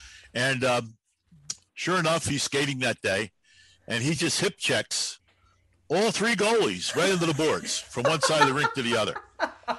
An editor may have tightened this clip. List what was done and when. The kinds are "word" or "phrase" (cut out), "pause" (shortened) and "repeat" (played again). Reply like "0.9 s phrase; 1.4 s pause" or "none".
none